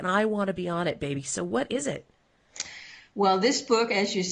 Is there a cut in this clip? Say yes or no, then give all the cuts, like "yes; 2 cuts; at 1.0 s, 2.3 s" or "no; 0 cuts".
no; 0 cuts